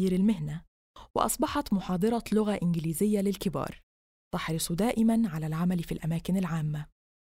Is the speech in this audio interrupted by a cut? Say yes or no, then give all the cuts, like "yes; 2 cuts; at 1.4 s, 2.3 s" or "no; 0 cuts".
no; 0 cuts